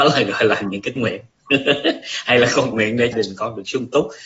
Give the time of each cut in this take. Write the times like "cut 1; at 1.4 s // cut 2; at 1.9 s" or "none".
cut 1; at 1.0 s // cut 2; at 2.7 s // cut 3; at 3.1 s